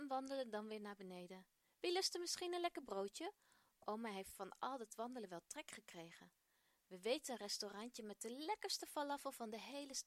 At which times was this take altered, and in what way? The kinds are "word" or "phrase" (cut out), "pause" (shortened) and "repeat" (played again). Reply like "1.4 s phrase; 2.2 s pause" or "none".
none